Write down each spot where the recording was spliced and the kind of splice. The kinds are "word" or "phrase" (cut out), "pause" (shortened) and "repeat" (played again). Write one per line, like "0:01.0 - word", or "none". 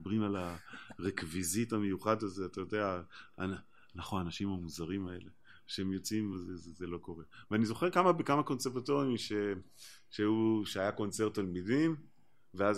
none